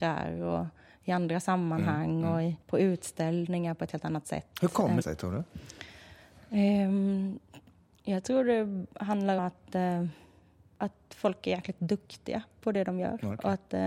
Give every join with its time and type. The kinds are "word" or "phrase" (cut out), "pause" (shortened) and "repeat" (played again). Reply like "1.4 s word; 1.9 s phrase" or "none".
2.6 s pause; 5.0 s word; 9.4 s word